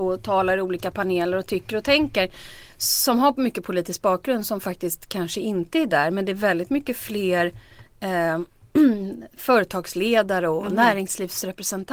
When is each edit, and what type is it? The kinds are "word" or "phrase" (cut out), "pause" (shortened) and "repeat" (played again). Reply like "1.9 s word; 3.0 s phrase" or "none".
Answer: none